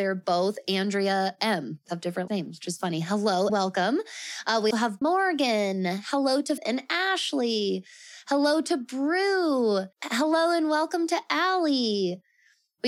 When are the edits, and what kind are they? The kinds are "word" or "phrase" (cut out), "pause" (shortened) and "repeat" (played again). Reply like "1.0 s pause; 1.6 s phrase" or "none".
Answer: 1.9 s word; 2.3 s word; 3.5 s word; 4.7 s word; 5.0 s phrase; 6.6 s word; 9.9 s pause